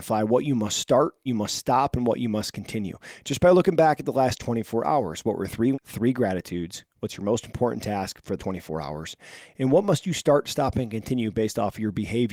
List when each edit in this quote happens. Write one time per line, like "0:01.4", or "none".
0:01.3
0:05.7
0:08.4